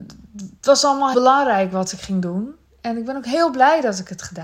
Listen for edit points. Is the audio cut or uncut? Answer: cut